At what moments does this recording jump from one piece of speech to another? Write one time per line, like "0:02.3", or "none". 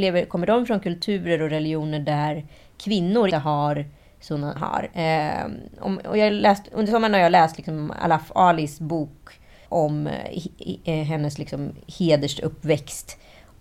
0:03.3
0:04.6
0:09.7